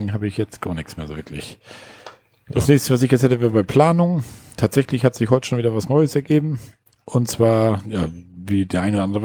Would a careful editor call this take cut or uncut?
uncut